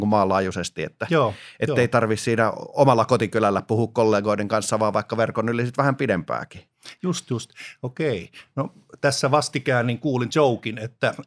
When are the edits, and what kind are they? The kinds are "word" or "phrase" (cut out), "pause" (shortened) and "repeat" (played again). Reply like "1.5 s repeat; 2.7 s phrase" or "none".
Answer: 10.3 s word